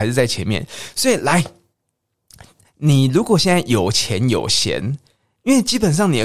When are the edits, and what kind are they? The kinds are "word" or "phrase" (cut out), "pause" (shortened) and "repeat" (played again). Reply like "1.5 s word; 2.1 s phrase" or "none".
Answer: none